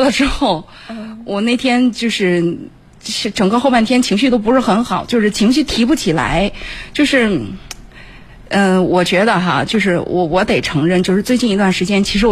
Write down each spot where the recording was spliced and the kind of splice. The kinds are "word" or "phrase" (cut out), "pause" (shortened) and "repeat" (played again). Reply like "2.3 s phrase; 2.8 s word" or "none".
none